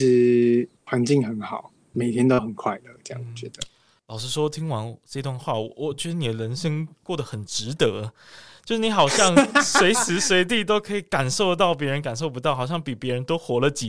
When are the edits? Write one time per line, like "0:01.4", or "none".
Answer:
0:01.9